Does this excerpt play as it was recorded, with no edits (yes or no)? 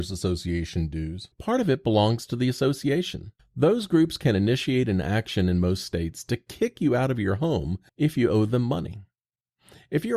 no